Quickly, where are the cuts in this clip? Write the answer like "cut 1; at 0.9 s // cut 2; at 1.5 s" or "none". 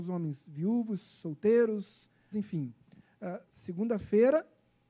cut 1; at 2.3 s